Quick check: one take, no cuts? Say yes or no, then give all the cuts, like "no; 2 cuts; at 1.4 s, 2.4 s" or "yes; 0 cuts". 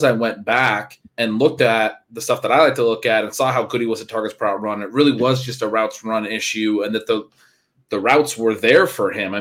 no; 1 cut; at 1.1 s